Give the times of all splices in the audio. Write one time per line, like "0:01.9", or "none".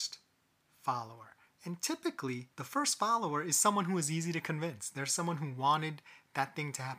0:02.5

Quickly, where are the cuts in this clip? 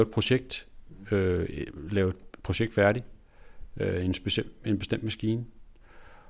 none

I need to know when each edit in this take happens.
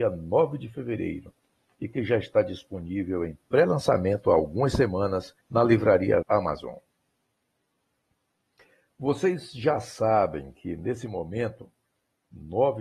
0:05.4
0:06.2

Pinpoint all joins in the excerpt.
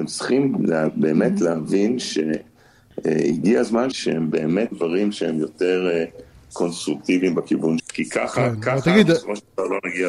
0:03.9
0:04.7
0:07.8

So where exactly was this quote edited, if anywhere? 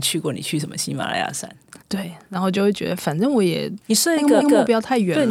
0:01.8
0:03.8
0:04.4

